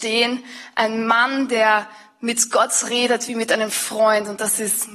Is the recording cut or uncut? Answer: uncut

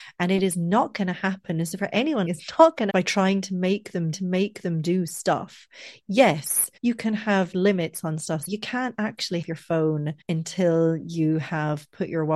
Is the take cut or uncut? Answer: cut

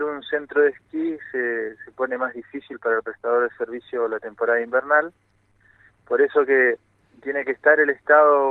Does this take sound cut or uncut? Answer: uncut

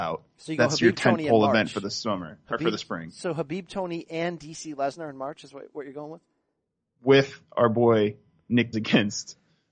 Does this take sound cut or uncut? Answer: cut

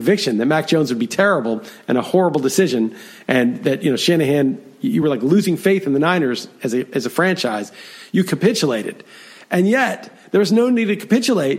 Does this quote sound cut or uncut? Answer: uncut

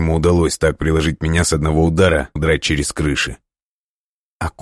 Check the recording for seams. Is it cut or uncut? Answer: cut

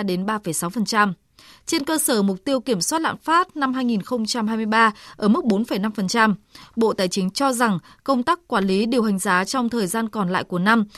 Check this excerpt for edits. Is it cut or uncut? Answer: uncut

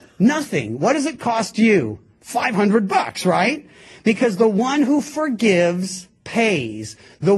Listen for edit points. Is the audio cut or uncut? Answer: uncut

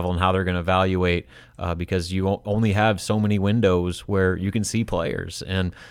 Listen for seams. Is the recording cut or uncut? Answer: uncut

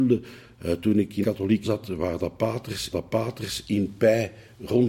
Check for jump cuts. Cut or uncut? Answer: cut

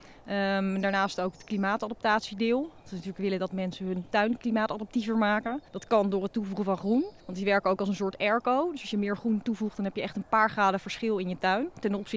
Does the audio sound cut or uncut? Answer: cut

